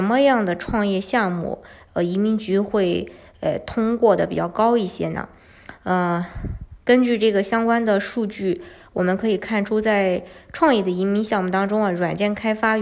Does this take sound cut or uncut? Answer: uncut